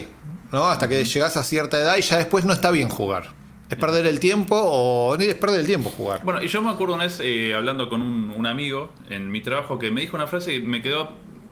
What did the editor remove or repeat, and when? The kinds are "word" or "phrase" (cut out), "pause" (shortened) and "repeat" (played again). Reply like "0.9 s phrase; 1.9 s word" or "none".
none